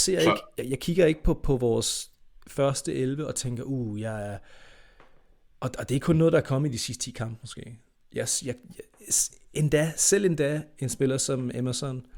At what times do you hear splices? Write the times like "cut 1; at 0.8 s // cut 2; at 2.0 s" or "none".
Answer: none